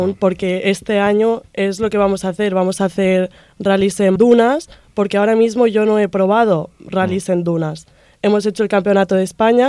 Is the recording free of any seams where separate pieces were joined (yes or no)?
no